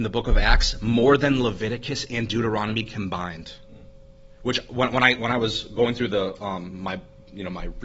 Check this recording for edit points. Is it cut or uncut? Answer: uncut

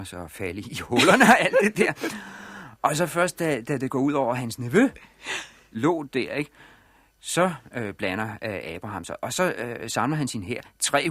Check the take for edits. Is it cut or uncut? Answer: uncut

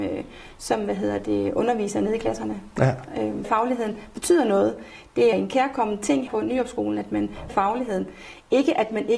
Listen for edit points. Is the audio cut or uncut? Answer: cut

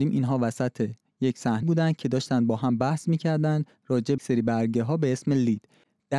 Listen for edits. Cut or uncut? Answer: cut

